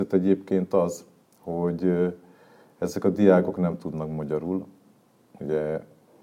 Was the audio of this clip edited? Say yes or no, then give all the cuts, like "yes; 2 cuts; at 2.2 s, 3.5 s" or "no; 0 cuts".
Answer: no; 0 cuts